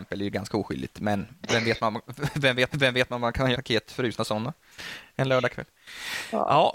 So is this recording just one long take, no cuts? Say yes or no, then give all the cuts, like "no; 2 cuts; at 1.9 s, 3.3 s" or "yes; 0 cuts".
no; 3 cuts; at 1.4 s, 2.7 s, 3.5 s